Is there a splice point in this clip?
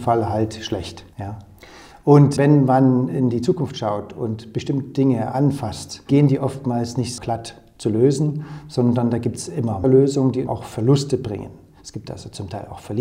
yes; 6 cuts; at 1.1 s, 2.4 s, 6.1 s, 7.2 s, 9.8 s, 10.5 s

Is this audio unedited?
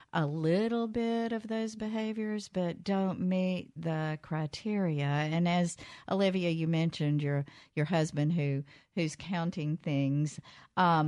yes; 0 cuts

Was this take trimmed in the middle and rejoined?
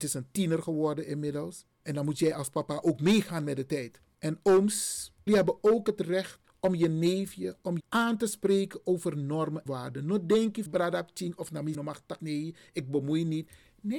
yes; 7 cuts; at 1.7 s, 5.3 s, 7.8 s, 9.7 s, 10.7 s, 11.7 s, 12.2 s

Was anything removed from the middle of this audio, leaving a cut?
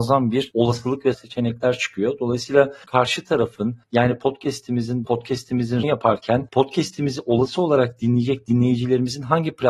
yes; 5 cuts; at 1.1 s, 2.8 s, 3.8 s, 5.0 s, 5.8 s

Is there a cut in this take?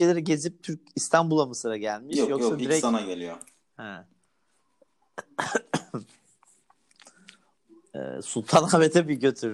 no; 0 cuts

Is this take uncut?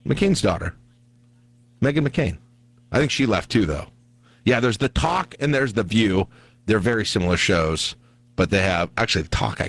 yes; 0 cuts

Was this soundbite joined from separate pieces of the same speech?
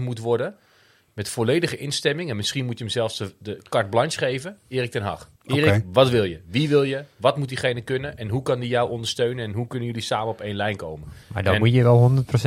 yes; 2 cuts; at 5.4 s, 11.2 s

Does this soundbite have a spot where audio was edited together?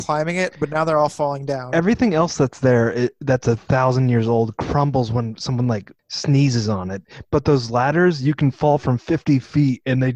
yes; 1 cut; at 6.0 s

